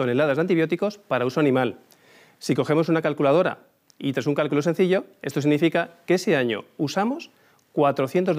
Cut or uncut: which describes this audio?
uncut